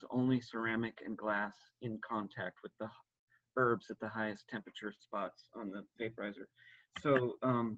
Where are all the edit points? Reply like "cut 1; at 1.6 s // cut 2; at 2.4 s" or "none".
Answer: none